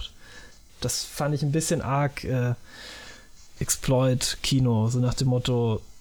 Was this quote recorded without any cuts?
yes; 0 cuts

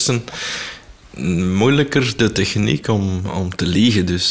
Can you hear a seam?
no; 0 cuts

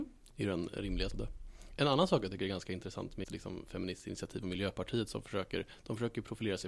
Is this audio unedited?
no; 2 cuts; at 1.1 s, 3.2 s

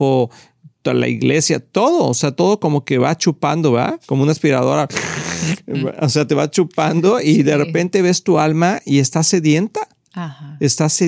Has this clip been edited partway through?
yes; 1 cut; at 4.0 s

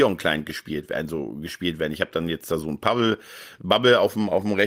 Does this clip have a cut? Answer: no; 0 cuts

